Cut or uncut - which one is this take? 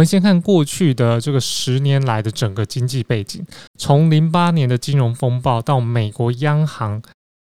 cut